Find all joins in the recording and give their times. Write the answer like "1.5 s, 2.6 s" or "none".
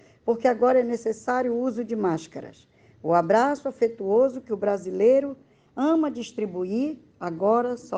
none